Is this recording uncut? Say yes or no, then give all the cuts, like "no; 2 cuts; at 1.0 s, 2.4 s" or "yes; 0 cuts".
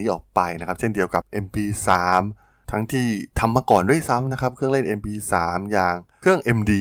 yes; 0 cuts